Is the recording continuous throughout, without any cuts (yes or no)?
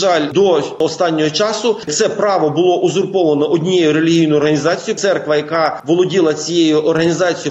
yes